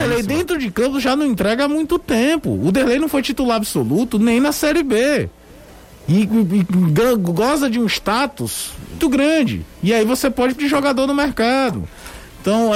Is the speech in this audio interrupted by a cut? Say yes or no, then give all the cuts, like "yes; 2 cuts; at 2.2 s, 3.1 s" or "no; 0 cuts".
yes; 2 cuts; at 9.0 s, 10.6 s